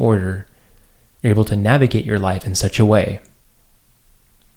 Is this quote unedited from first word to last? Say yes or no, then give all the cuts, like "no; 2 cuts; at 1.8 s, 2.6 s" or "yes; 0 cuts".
yes; 0 cuts